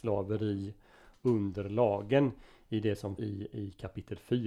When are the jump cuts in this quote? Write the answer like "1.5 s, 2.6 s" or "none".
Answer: 3.2 s